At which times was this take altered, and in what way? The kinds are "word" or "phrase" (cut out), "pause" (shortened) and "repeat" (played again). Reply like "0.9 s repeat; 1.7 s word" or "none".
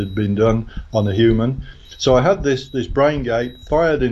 none